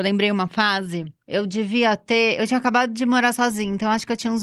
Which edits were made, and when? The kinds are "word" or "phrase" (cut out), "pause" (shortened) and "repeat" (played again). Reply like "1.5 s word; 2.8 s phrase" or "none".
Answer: none

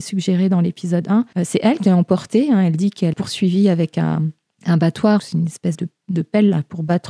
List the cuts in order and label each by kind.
1.3 s pause; 1.8 s word; 3.1 s word; 4.4 s pause; 5.2 s word; 5.7 s word

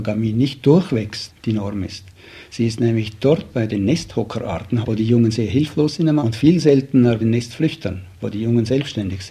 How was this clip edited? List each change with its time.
3.5 s word; 4.8 s word; 6.2 s word; 7.2 s word

